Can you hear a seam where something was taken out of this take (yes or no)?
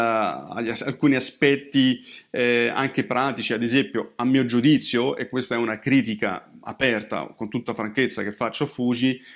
no